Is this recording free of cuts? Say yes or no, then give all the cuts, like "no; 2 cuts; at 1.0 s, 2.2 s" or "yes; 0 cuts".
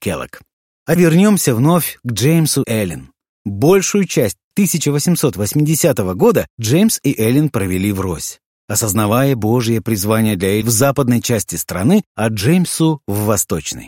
no; 3 cuts; at 1.0 s, 2.6 s, 10.6 s